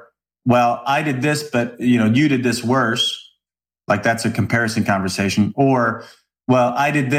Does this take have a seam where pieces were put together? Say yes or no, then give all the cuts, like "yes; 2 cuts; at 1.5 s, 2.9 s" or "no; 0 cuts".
no; 0 cuts